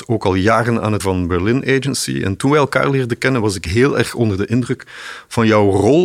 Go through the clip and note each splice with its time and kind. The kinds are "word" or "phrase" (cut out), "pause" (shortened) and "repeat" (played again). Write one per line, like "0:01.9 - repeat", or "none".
0:01.0 - word